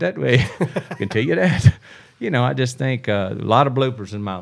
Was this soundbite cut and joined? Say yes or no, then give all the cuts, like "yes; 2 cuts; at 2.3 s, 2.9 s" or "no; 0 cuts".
no; 0 cuts